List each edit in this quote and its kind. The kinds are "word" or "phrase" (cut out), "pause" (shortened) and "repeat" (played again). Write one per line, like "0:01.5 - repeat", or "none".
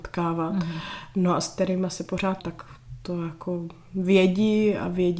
0:02.4 - word